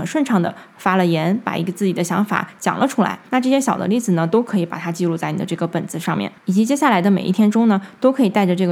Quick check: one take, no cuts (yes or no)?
no